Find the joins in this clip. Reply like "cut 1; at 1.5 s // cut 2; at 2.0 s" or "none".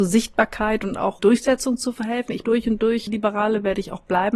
cut 1; at 1.2 s // cut 2; at 2.4 s // cut 3; at 3.1 s